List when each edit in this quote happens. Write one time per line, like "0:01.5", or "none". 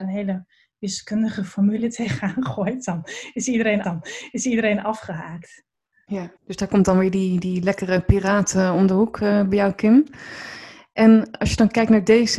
0:03.8
0:06.4